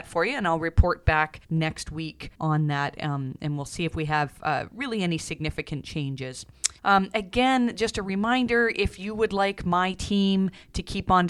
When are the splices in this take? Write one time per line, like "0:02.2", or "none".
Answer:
0:01.4
0:02.3
0:06.8